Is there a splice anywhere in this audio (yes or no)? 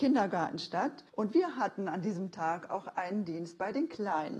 yes